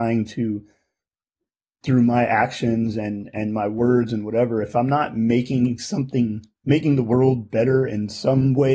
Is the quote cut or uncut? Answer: uncut